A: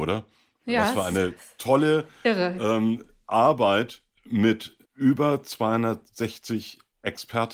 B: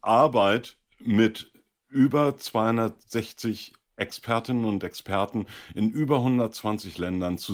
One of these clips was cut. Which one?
A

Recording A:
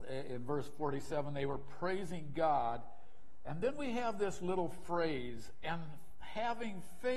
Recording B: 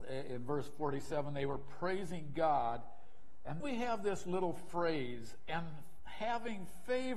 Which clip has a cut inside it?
B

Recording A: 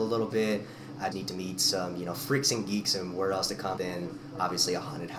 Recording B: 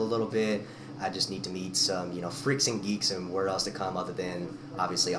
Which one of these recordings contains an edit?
A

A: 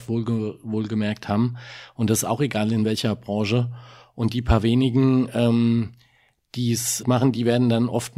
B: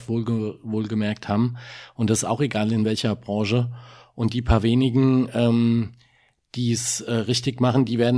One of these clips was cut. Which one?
A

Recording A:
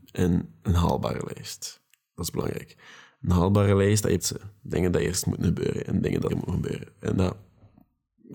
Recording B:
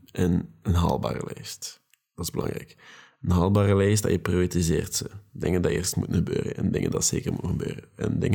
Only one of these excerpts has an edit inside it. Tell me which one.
A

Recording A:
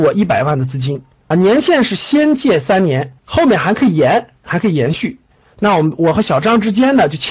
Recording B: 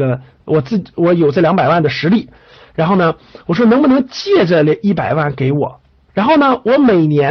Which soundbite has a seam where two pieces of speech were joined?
A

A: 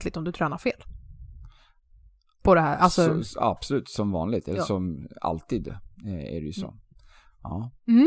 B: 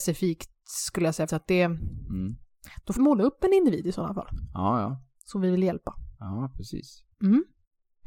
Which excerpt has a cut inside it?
B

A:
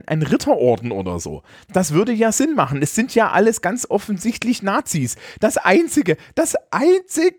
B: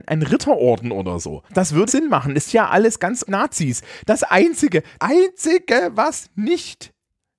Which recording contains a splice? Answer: B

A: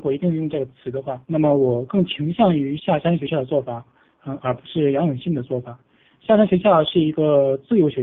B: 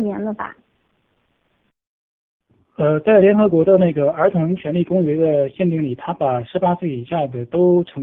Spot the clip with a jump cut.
A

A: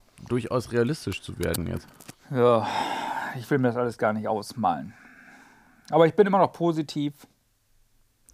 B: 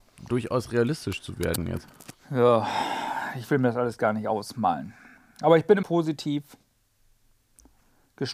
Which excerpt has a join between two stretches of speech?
B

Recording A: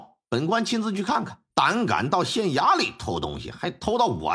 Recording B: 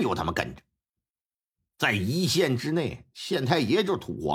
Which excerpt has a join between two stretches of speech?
A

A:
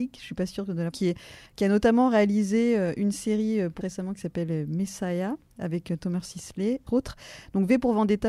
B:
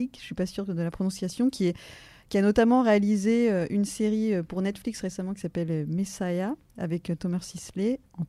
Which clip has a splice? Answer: A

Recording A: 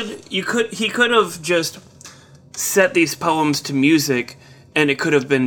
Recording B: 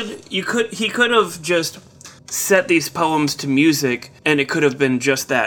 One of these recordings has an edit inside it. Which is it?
B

